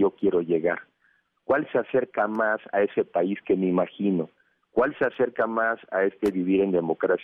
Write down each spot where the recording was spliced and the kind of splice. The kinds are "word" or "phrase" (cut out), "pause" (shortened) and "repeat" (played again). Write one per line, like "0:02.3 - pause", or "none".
none